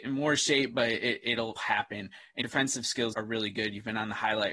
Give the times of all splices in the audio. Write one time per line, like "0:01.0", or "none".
0:01.6
0:02.4
0:03.1